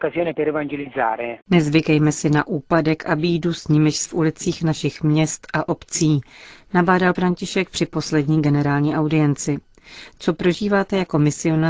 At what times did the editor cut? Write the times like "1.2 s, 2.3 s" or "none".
1.4 s, 4.1 s, 7.1 s